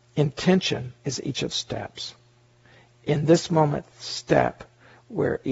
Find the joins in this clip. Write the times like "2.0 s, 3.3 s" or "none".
1.0 s, 1.5 s